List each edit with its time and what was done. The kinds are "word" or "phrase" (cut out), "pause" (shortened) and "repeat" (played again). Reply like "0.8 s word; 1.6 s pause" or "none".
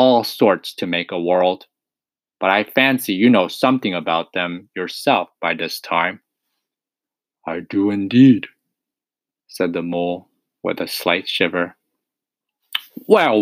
none